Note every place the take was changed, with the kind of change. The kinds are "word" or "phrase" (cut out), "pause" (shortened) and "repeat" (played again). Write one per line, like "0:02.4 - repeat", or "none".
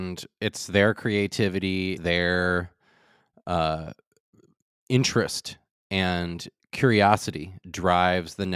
0:02.0 - word
0:07.6 - word